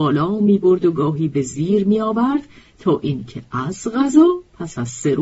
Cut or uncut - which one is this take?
uncut